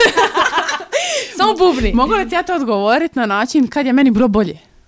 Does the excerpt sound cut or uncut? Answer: uncut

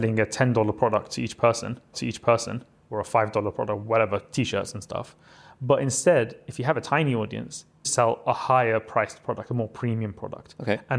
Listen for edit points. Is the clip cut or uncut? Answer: cut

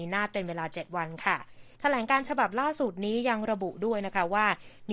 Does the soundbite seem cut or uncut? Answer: cut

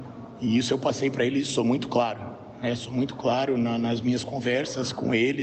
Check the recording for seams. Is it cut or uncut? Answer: uncut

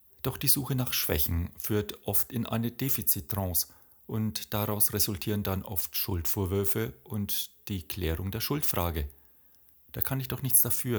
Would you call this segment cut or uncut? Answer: uncut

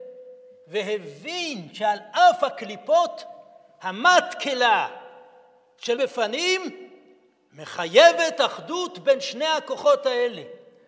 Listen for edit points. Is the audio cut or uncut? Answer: cut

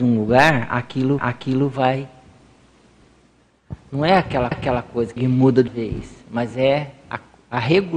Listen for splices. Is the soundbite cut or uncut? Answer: cut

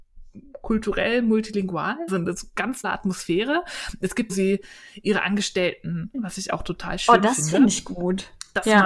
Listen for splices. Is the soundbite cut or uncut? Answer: cut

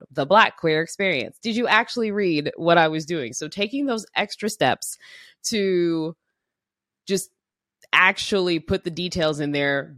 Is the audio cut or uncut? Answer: uncut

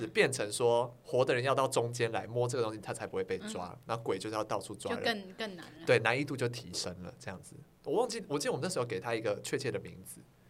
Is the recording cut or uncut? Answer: uncut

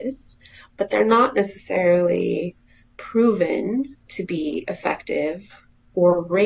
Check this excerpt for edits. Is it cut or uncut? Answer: cut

